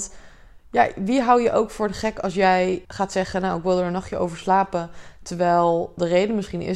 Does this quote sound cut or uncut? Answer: cut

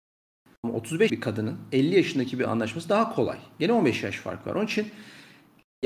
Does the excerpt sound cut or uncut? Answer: cut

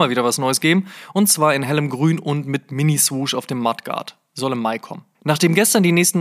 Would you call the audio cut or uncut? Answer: cut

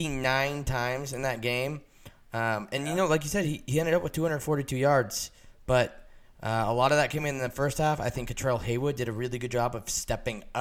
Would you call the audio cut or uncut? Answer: uncut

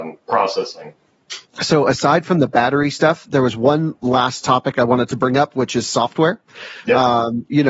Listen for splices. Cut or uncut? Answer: cut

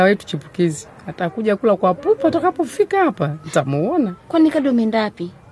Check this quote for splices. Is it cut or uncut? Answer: cut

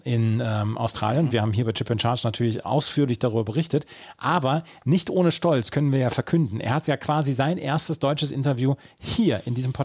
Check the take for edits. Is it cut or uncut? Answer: uncut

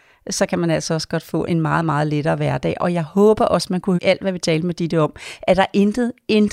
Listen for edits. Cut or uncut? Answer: cut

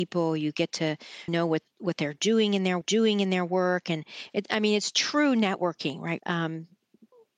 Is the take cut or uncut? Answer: cut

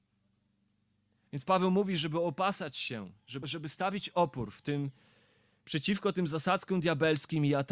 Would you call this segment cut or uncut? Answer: cut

